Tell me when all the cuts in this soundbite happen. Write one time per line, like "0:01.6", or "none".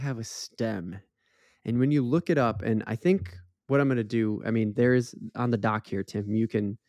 none